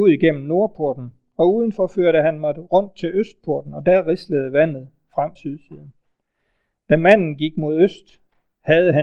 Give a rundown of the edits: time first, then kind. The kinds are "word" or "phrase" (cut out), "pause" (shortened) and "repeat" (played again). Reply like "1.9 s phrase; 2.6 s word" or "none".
5.4 s word